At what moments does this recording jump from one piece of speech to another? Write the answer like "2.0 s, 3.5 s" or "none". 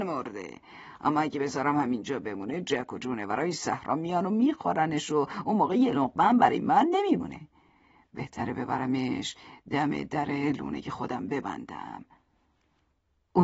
none